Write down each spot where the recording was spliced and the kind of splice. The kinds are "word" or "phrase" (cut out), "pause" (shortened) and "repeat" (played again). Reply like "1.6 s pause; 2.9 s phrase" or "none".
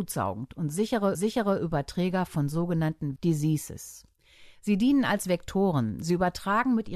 1.1 s repeat; 3.2 s word